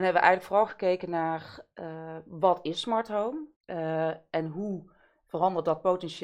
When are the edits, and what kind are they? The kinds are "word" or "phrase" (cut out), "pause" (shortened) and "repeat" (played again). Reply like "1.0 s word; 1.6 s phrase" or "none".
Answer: 3.5 s pause